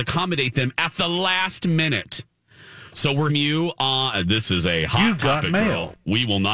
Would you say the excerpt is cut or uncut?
cut